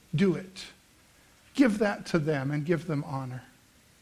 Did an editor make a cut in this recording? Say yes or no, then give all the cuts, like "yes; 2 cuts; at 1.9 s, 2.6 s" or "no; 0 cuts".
no; 0 cuts